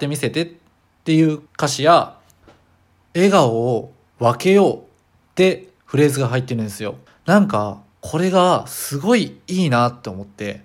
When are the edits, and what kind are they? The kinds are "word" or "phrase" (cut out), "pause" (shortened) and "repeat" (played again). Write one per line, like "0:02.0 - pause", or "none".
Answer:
0:01.5 - pause
0:05.8 - pause
0:07.1 - pause